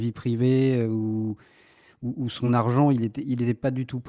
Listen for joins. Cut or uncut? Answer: uncut